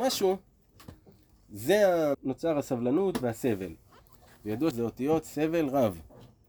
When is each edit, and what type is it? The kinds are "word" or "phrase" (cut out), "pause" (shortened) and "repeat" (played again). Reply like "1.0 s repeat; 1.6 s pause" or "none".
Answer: 2.1 s word; 4.7 s word